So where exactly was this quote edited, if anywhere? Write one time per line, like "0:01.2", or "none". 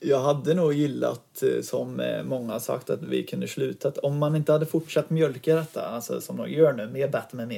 none